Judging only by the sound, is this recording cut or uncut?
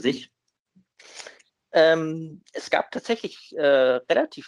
uncut